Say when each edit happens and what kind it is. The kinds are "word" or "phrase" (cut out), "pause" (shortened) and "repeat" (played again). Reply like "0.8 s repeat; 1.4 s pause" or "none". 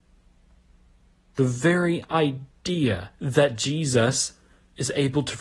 3.1 s pause